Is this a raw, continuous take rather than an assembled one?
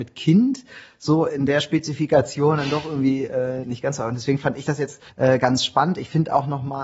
no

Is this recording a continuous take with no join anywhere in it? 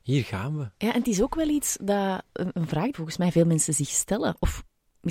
no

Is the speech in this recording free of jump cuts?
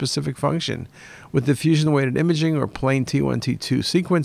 yes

